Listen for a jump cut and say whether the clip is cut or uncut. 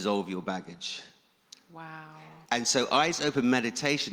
cut